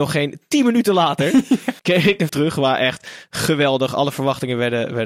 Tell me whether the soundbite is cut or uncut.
cut